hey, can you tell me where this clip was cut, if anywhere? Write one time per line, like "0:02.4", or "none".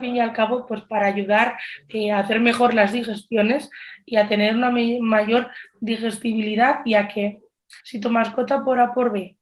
0:07.8